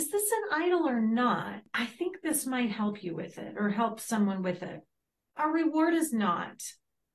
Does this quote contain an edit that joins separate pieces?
no; 0 cuts

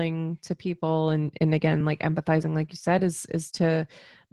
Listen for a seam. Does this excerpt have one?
no; 0 cuts

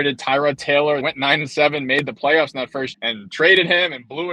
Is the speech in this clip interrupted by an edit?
yes; 2 cuts; at 1.0 s, 2.9 s

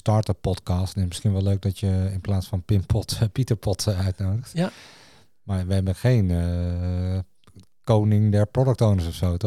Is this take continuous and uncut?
yes; 0 cuts

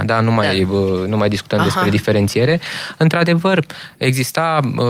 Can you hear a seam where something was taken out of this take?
no; 0 cuts

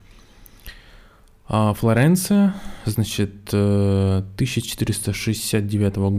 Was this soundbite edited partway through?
no; 0 cuts

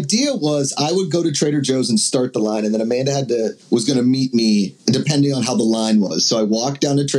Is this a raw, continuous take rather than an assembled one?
no; 2 cuts; at 3.6 s, 4.8 s

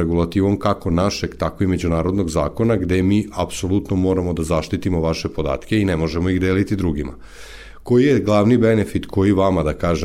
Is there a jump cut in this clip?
no; 0 cuts

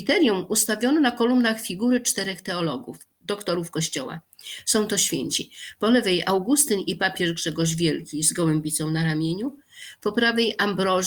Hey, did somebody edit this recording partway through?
no; 0 cuts

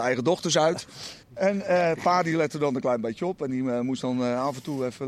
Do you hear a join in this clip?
yes; 1 cut; at 1.2 s

